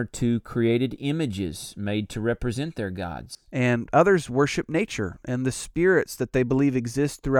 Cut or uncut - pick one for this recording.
uncut